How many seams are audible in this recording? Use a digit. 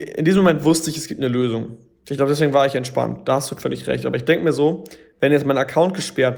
0